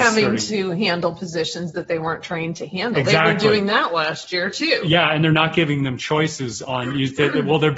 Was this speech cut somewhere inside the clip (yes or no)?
no